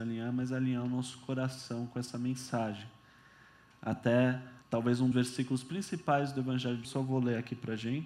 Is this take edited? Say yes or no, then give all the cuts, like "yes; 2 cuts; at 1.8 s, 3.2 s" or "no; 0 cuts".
yes; 3 cuts; at 4.6 s, 5.1 s, 6.8 s